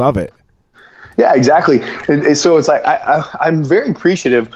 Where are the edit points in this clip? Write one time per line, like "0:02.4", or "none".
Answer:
none